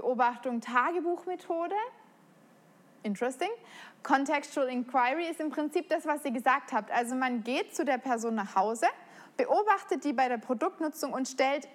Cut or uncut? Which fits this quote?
uncut